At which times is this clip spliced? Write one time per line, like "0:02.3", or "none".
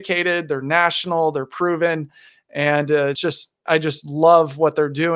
0:03.7